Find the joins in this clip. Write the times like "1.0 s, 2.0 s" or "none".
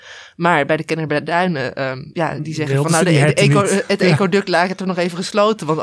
none